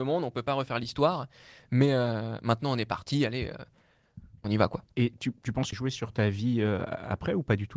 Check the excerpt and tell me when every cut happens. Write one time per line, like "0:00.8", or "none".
0:04.9
0:05.7